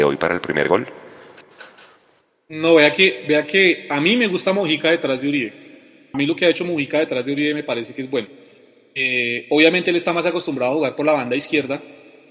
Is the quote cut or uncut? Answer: uncut